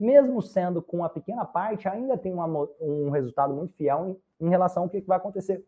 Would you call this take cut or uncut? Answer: uncut